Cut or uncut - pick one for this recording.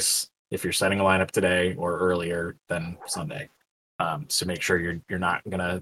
uncut